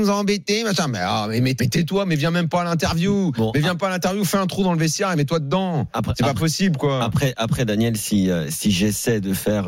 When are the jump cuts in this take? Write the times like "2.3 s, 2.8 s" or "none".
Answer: 1.6 s

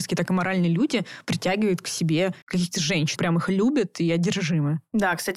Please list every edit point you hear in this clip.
2.4 s, 3.2 s

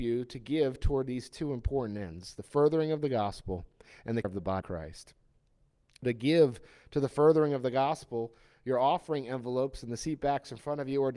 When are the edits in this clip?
4.2 s, 4.6 s, 6.0 s

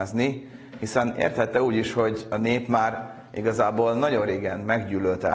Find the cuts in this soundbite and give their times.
none

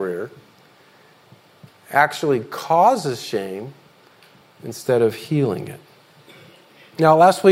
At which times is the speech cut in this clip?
none

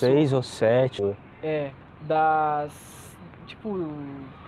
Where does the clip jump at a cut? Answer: 1.0 s

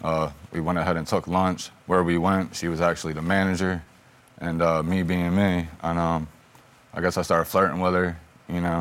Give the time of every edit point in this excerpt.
none

